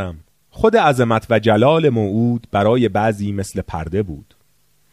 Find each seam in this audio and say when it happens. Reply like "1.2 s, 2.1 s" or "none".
none